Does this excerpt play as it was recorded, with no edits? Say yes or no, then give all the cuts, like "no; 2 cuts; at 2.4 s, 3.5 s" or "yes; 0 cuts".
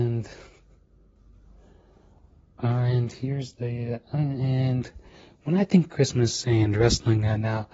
yes; 0 cuts